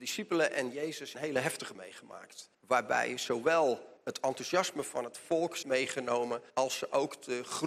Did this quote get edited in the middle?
yes; 6 cuts; at 1.1 s, 1.7 s, 2.5 s, 4.0 s, 5.6 s, 6.5 s

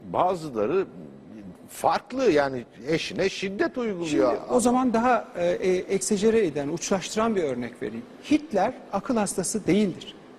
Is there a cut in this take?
no; 0 cuts

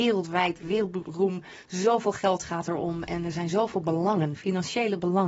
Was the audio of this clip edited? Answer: no; 0 cuts

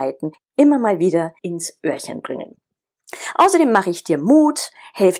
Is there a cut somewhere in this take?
yes; 1 cut; at 1.4 s

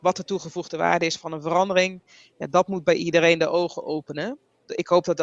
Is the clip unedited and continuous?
yes; 0 cuts

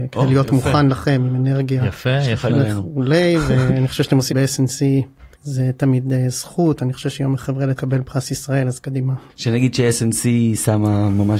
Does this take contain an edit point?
yes; 6 cuts; at 2.5 s, 4.3 s, 5.3 s, 7.4 s, 7.8 s, 9.3 s

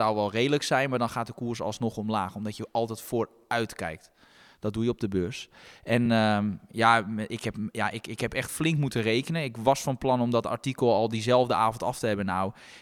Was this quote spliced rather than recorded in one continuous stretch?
no; 0 cuts

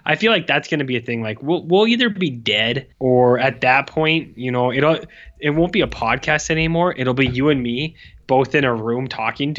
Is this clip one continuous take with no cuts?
no; 1 cut; at 2.9 s

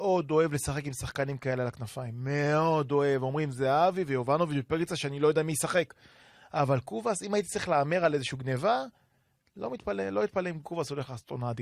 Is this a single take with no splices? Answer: yes; 0 cuts

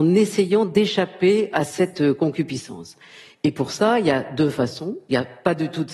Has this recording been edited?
no; 0 cuts

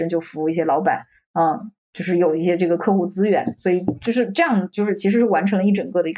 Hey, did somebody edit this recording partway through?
no; 0 cuts

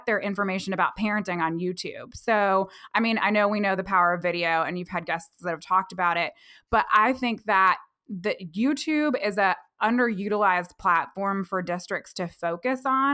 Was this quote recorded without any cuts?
yes; 0 cuts

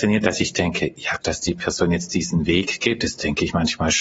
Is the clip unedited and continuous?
no; 1 cut; at 1.2 s

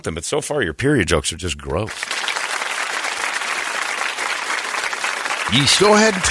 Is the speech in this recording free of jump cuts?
yes; 0 cuts

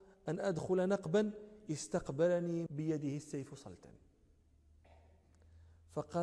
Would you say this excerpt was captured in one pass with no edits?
no; 1 cut; at 2.7 s

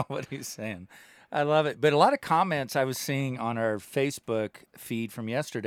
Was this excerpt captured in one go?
yes; 0 cuts

